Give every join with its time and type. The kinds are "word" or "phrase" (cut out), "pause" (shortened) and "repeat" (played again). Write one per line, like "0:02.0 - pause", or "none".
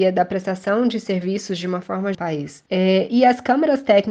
0:02.1 - phrase